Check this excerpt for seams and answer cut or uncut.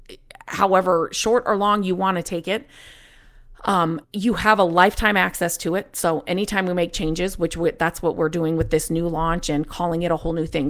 cut